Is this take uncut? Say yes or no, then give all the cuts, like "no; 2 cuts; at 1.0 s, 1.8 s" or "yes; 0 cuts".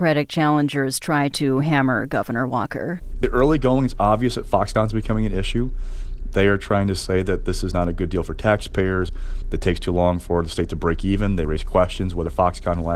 yes; 0 cuts